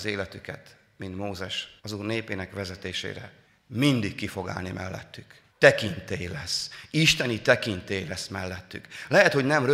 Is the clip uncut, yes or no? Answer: no